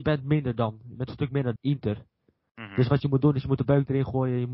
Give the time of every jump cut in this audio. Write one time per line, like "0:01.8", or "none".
0:01.6